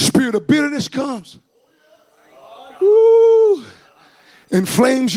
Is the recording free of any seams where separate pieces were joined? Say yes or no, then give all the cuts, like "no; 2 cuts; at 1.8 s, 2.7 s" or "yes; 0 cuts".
yes; 0 cuts